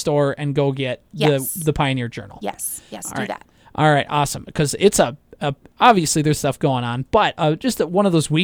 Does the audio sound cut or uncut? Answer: cut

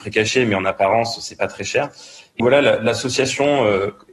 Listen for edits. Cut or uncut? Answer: cut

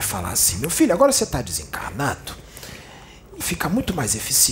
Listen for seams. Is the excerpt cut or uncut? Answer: cut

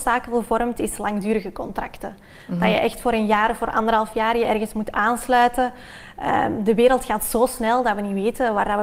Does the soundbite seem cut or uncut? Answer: uncut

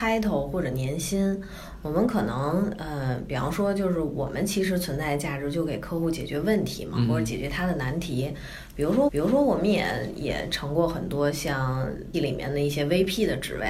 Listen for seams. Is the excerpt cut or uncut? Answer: cut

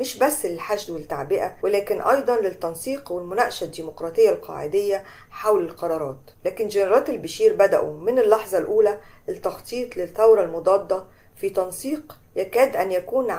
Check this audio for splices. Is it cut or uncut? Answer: uncut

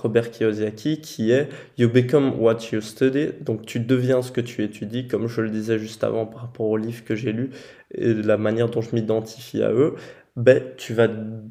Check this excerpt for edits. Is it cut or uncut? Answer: uncut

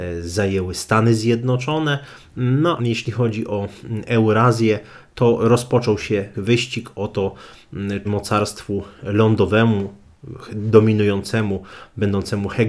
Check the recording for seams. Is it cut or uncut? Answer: cut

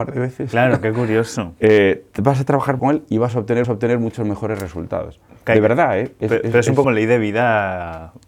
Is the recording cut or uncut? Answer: cut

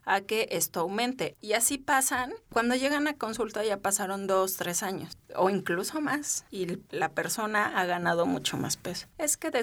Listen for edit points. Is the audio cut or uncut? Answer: uncut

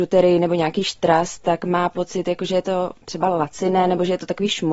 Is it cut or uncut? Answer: cut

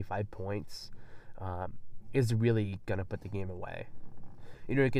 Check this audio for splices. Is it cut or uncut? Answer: uncut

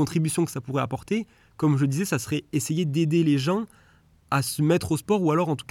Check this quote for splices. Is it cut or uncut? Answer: uncut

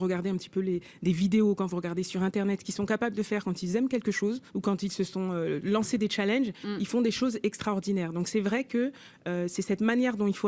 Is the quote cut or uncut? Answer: cut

